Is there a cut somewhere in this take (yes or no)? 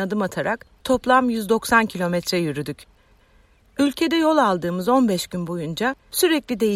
no